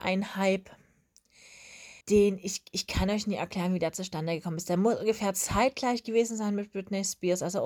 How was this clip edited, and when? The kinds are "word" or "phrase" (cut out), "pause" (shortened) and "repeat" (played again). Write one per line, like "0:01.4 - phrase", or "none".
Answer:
0:02.0 - pause